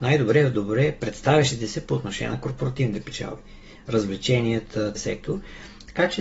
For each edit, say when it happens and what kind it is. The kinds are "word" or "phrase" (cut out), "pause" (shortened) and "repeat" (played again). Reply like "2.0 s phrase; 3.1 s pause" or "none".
5.0 s word